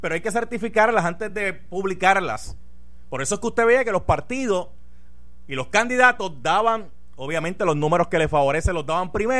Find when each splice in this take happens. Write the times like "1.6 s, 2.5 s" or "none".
none